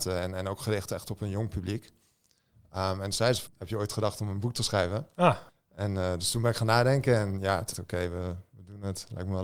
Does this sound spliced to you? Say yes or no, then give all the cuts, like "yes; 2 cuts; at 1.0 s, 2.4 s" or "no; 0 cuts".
yes; 3 cuts; at 3.5 s, 5.5 s, 7.7 s